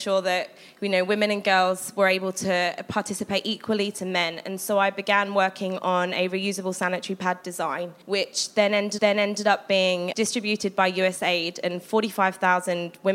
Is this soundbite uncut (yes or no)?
no